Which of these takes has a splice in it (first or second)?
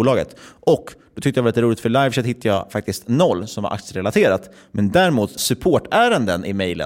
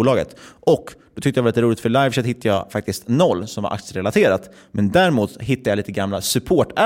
first